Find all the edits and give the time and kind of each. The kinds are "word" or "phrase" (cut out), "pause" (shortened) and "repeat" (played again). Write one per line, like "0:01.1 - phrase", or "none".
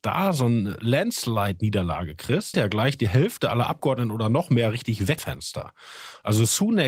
0:02.5 - phrase
0:05.2 - word